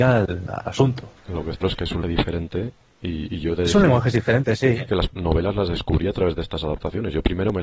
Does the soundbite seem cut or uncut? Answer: cut